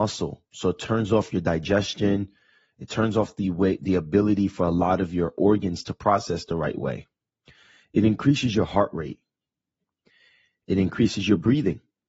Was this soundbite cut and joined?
no; 0 cuts

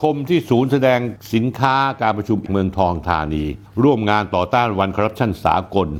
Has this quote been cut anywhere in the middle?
yes; 1 cut; at 2.5 s

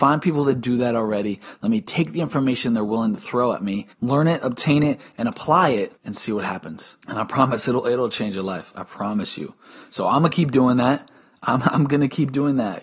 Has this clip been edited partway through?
yes; 3 cuts; at 3.9 s, 6.0 s, 7.0 s

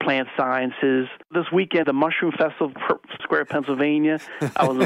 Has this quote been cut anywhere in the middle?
yes; 3 cuts; at 1.2 s, 1.8 s, 3.2 s

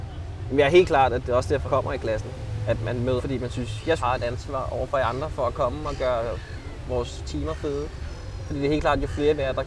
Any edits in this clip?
yes; 3 cuts; at 1.6 s, 3.2 s, 4.0 s

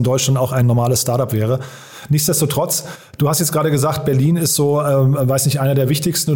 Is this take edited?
no; 0 cuts

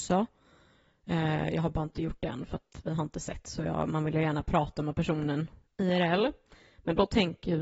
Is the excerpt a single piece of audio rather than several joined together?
yes; 0 cuts

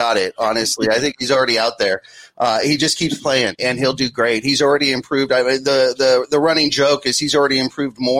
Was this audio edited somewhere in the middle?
yes; 1 cut; at 3.6 s

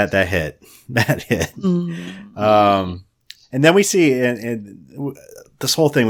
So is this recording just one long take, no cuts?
yes; 0 cuts

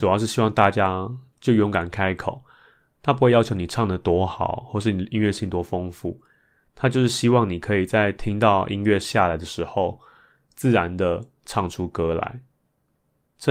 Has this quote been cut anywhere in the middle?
no; 0 cuts

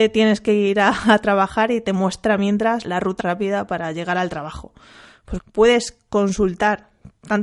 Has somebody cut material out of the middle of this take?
yes; 3 cuts; at 2.8 s, 3.2 s, 5.4 s

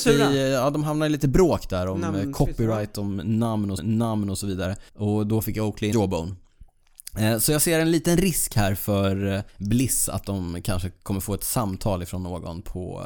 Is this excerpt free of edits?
no; 4 cuts; at 3.8 s, 4.9 s, 5.9 s, 9.5 s

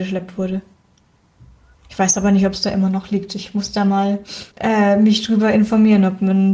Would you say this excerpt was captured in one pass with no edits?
no; 1 cut; at 4.5 s

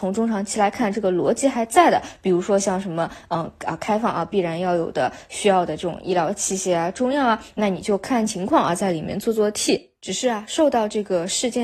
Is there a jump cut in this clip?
no; 0 cuts

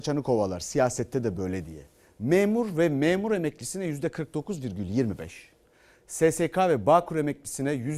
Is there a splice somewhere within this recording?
no; 0 cuts

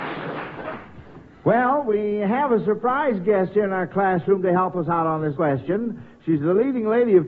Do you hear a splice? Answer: yes; 1 cut; at 5.3 s

